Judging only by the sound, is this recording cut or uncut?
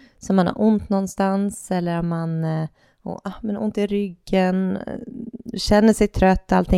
uncut